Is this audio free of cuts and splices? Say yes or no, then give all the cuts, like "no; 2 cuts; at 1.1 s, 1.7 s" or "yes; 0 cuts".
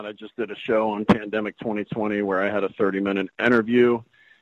yes; 0 cuts